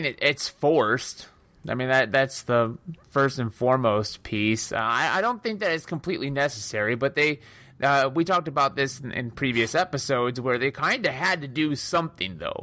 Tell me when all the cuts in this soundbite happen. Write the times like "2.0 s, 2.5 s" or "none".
none